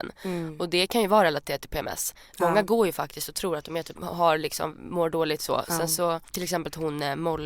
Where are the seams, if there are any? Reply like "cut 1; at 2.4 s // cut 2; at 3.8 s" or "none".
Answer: cut 1; at 3.9 s // cut 2; at 6.3 s